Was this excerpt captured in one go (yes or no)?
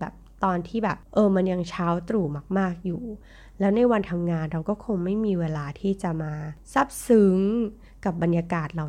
yes